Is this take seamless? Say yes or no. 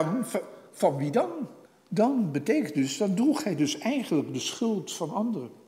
no